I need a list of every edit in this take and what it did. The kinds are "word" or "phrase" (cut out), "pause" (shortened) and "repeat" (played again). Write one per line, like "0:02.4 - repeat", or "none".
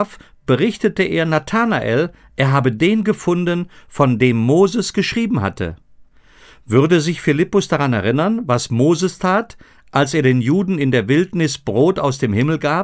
none